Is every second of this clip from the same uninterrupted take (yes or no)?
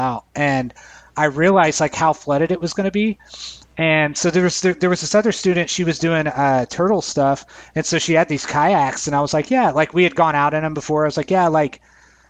yes